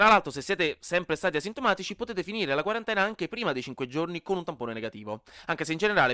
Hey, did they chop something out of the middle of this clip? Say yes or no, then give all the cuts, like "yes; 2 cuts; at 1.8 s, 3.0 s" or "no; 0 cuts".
no; 0 cuts